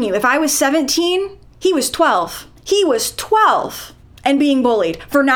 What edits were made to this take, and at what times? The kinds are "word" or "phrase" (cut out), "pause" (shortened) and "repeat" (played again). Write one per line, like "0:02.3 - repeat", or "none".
0:01.4 - pause
0:02.6 - pause
0:04.0 - pause

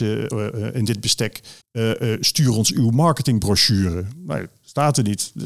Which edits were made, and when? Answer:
0:01.6 - pause

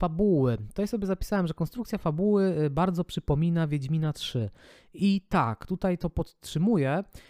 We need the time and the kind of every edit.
none

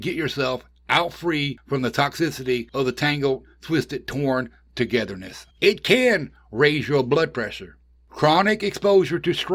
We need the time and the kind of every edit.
0:05.5 - pause

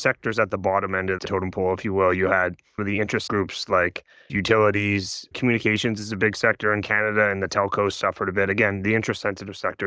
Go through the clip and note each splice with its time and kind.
0:01.2 - word
0:02.8 - word
0:03.3 - word
0:04.3 - word

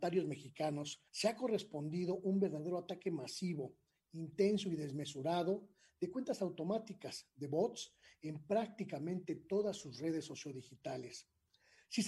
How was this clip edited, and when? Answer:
0:01.1 - pause

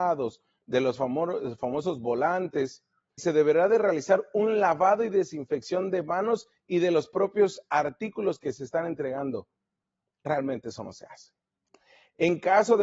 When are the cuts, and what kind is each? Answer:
0:03.2 - word

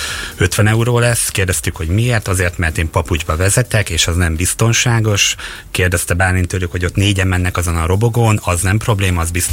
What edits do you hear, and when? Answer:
none

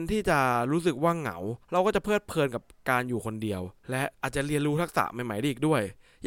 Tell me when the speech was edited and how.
0:01.6 - pause
0:03.8 - pause
0:04.1 - pause

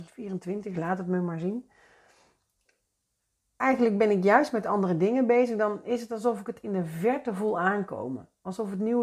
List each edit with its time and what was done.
none

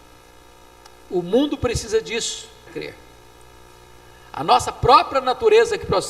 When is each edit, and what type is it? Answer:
0:02.7 - word

